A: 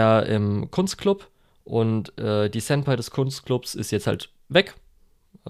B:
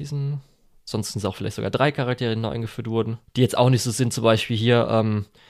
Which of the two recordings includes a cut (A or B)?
B